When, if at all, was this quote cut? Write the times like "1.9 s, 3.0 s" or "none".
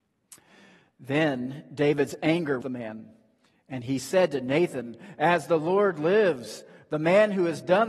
2.6 s